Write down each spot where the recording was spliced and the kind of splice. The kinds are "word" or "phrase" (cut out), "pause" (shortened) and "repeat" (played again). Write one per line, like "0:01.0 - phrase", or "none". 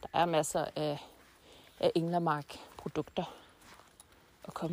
none